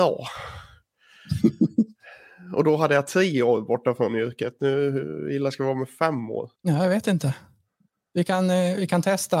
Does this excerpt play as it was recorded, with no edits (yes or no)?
no